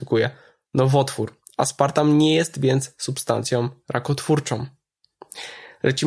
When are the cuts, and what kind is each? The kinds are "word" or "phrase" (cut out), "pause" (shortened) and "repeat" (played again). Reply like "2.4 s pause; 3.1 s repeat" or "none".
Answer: none